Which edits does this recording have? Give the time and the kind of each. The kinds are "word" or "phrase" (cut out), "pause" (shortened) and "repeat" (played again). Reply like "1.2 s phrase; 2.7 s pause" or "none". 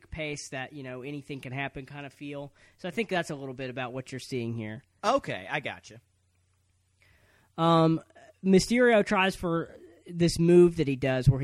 none